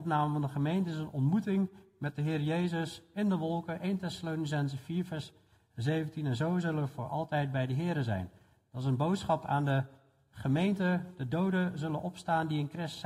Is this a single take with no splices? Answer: yes; 0 cuts

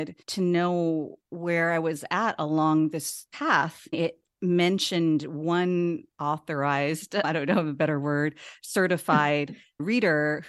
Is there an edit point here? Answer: no; 0 cuts

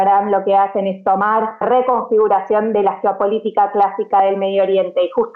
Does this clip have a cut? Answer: yes; 1 cut; at 1.6 s

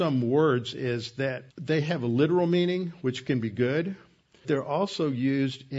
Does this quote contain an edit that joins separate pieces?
yes; 2 cuts; at 1.5 s, 4.4 s

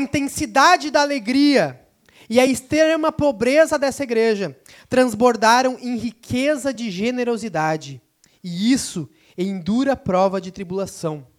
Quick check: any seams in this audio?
no; 0 cuts

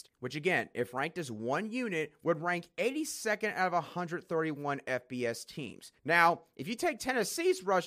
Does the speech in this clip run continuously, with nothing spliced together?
no; 1 cut; at 6.0 s

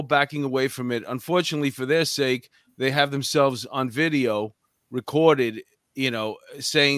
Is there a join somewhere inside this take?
no; 0 cuts

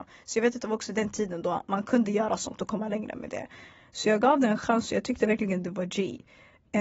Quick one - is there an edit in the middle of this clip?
no; 0 cuts

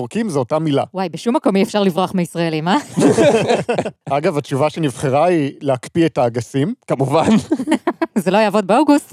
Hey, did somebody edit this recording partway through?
no; 0 cuts

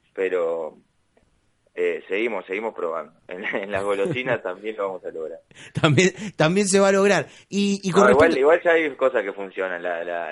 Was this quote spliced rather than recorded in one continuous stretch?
no; 0 cuts

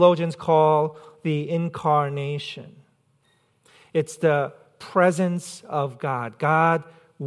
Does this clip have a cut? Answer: no; 0 cuts

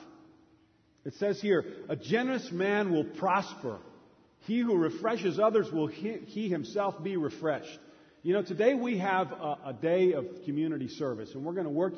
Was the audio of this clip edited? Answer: no; 0 cuts

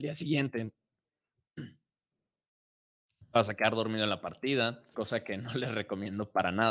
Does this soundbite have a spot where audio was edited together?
yes; 1 cut; at 4.9 s

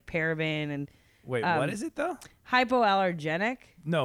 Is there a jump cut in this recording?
no; 0 cuts

